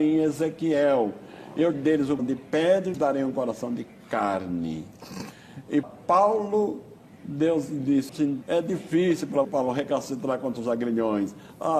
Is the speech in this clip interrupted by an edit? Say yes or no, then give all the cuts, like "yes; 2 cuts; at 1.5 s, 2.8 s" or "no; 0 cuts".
yes; 7 cuts; at 1.7 s, 2.2 s, 2.9 s, 5.8 s, 8.1 s, 8.4 s, 9.4 s